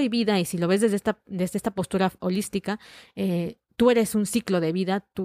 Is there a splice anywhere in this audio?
no; 0 cuts

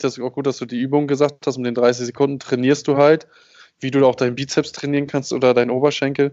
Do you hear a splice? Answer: no; 0 cuts

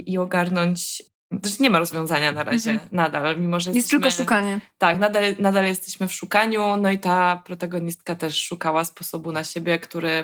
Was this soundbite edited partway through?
no; 0 cuts

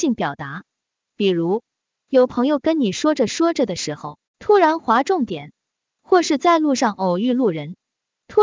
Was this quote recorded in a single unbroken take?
no; 1 cut; at 4.3 s

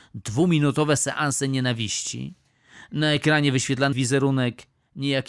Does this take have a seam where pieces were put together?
yes; 1 cut; at 3.9 s

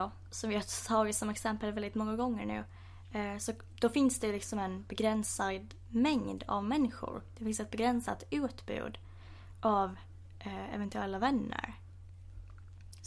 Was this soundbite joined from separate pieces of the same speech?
no; 0 cuts

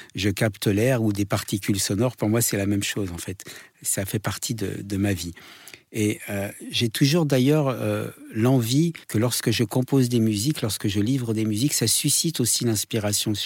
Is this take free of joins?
no; 1 cut; at 9.0 s

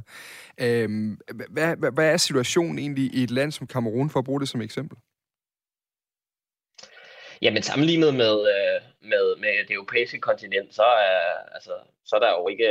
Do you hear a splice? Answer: no; 0 cuts

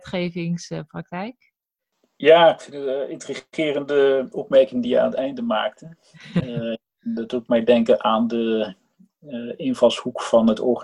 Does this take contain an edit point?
no; 0 cuts

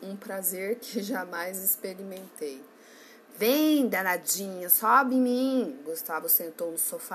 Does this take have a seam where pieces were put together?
no; 0 cuts

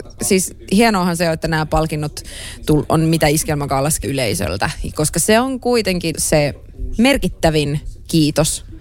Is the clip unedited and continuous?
no; 2 cuts; at 4.0 s, 6.1 s

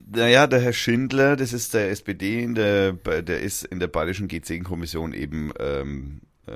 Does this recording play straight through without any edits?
yes; 0 cuts

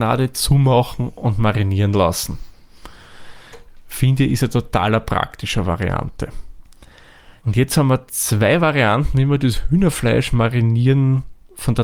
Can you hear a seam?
yes; 1 cut; at 7.4 s

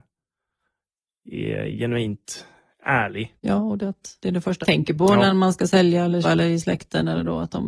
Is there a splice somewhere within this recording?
yes; 4 cuts; at 3.4 s, 4.2 s, 4.6 s, 6.2 s

